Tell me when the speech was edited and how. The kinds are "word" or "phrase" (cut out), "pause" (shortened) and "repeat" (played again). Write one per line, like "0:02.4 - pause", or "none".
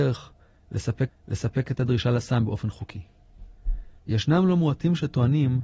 0:01.1 - repeat
0:04.0 - pause